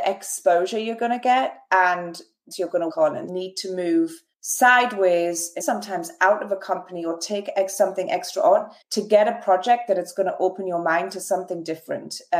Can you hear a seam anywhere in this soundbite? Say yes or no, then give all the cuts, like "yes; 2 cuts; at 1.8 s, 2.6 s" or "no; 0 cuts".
yes; 6 cuts; at 2.5 s, 2.9 s, 3.3 s, 4.3 s, 5.6 s, 8.8 s